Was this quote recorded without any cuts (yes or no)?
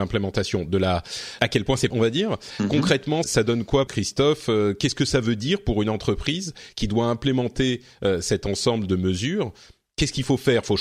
no